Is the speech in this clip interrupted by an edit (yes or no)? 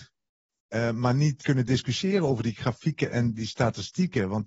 yes